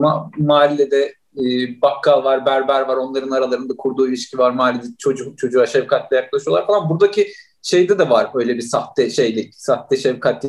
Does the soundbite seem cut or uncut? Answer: uncut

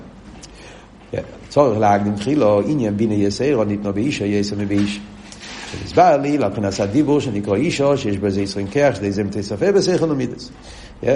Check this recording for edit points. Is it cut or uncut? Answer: uncut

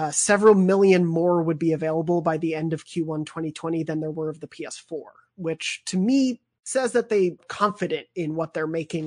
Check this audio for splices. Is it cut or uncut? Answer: cut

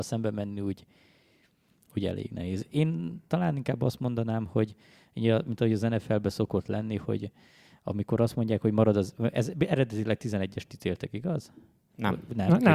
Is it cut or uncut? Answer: uncut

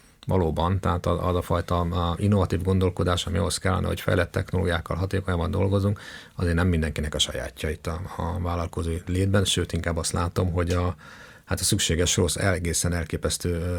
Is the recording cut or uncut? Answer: uncut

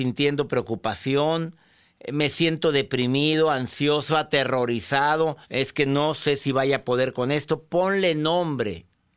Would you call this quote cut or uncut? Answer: cut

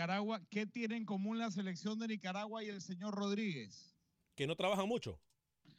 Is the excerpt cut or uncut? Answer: uncut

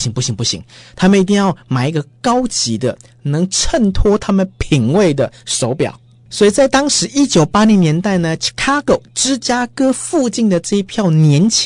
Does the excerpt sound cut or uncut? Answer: uncut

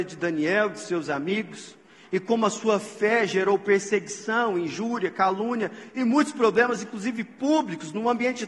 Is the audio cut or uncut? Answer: uncut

